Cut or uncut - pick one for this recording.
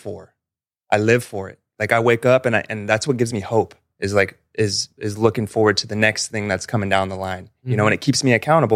uncut